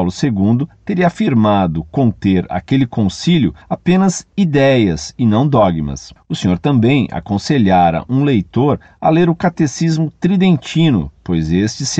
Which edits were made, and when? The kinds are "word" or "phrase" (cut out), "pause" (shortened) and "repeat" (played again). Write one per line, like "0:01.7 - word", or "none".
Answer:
0:03.6 - pause